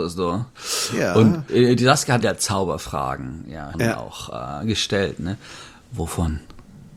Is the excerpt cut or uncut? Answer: cut